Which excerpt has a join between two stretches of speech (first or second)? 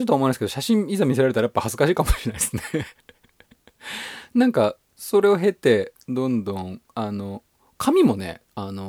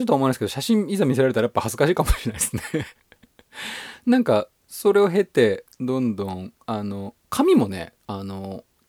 second